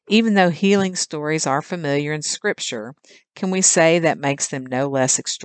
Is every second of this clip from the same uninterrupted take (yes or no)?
yes